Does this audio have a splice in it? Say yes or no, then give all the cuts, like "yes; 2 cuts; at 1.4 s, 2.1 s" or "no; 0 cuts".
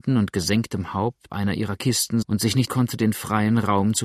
yes; 3 cuts; at 1.3 s, 2.2 s, 2.7 s